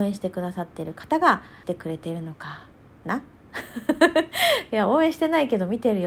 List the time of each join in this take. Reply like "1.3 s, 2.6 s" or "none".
none